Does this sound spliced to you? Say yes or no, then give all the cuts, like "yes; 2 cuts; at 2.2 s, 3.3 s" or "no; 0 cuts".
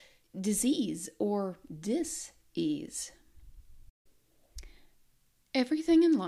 no; 0 cuts